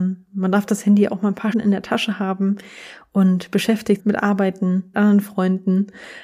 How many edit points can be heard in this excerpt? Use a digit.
3